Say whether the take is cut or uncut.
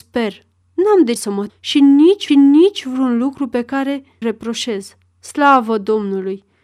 cut